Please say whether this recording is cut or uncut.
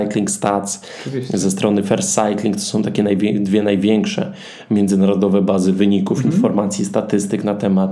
uncut